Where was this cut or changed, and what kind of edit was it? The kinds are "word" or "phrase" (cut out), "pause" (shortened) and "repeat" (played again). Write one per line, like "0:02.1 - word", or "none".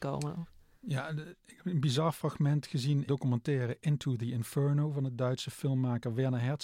0:03.1 - phrase